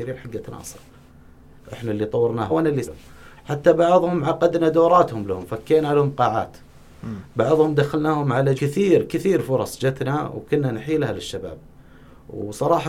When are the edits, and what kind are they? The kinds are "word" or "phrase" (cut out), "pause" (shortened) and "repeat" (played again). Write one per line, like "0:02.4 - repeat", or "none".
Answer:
0:02.5 - word
0:02.8 - word
0:08.6 - phrase